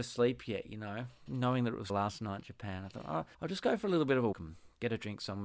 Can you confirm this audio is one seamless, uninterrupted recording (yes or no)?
no